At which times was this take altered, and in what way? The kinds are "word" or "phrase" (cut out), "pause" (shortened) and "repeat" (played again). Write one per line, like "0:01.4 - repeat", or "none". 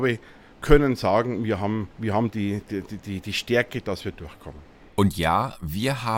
0:01.9 - pause

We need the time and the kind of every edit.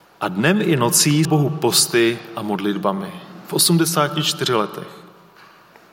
0:01.2 - word

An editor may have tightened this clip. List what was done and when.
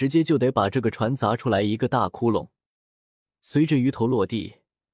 none

